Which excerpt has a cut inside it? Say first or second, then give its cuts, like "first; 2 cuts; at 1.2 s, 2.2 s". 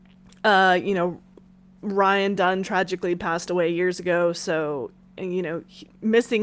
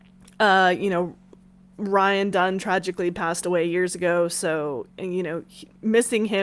second; 1 cut; at 4.9 s